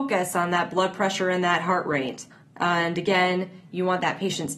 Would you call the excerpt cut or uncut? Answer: cut